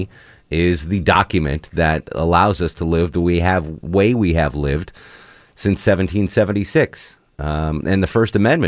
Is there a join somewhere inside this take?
no; 0 cuts

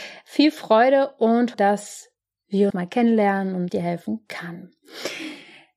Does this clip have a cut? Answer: yes; 3 cuts; at 1.5 s, 2.7 s, 3.7 s

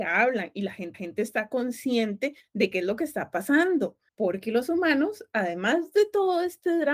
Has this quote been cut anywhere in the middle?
yes; 1 cut; at 0.9 s

